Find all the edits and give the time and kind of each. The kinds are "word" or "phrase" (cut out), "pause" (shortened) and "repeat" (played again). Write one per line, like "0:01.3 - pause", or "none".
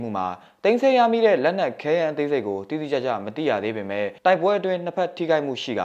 0:04.2 - pause